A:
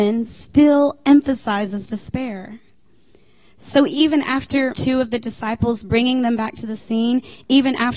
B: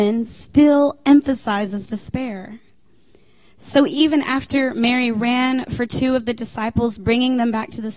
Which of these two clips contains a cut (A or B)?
A